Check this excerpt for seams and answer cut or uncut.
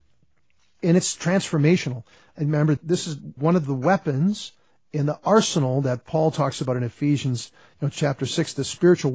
uncut